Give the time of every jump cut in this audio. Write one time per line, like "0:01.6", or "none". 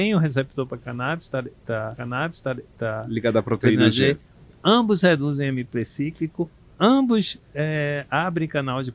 0:01.9